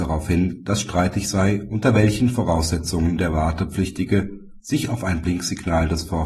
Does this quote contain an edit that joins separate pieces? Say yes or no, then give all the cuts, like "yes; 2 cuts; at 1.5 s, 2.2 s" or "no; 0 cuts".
no; 0 cuts